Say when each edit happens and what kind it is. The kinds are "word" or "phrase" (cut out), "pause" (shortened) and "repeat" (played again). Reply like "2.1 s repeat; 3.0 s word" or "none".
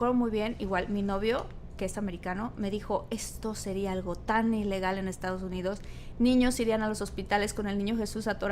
none